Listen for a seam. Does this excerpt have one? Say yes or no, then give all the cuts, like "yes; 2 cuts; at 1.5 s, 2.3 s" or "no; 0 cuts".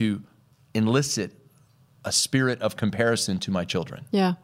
no; 0 cuts